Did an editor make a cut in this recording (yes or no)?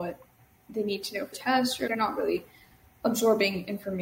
yes